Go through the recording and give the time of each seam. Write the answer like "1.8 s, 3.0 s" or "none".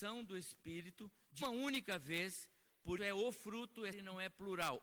1.4 s, 3.0 s, 3.9 s